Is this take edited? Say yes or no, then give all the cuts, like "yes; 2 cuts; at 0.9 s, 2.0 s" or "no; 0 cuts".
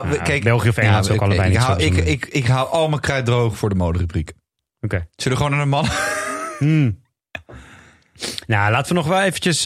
no; 0 cuts